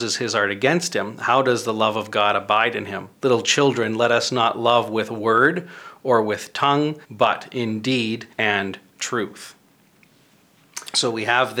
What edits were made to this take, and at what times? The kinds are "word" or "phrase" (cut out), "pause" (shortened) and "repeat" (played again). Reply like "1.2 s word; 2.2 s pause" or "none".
3.1 s pause; 7.0 s pause; 8.3 s pause